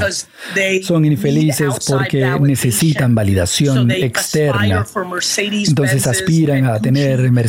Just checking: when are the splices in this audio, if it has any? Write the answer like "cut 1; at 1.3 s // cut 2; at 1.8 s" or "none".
none